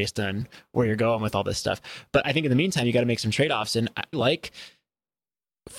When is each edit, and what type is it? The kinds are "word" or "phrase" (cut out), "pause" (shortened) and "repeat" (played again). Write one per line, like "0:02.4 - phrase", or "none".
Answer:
0:04.1 - phrase